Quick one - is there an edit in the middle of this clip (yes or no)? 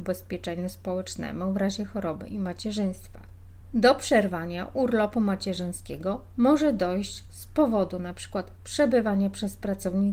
no